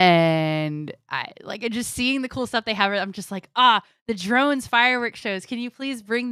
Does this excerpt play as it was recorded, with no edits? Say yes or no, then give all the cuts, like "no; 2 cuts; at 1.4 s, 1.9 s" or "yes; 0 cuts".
yes; 0 cuts